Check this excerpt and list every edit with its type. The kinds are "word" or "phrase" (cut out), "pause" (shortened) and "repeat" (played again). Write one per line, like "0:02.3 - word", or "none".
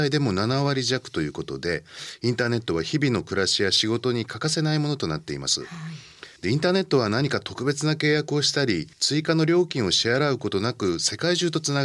0:06.4 - pause
0:08.9 - pause